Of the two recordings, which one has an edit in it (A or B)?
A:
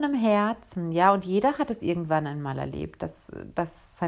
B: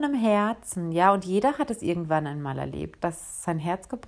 B